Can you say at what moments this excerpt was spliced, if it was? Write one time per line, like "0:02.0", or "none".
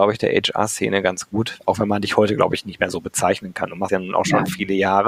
0:03.9